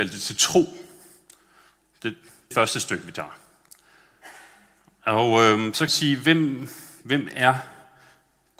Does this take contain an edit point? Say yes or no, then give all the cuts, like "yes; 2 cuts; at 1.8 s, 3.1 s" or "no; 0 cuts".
yes; 2 cuts; at 2.5 s, 5.9 s